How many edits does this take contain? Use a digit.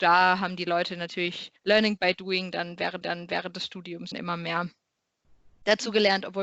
3